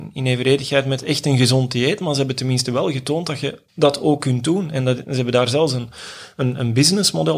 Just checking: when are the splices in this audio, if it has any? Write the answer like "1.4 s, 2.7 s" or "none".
3.7 s